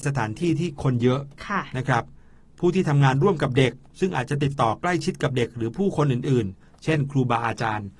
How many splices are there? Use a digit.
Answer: 0